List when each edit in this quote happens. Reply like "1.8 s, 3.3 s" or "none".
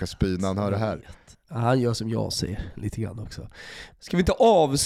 1.3 s